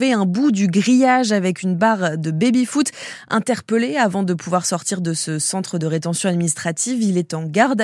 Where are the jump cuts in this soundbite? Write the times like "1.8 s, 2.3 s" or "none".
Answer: none